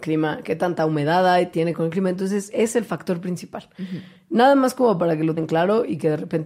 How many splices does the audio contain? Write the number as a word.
three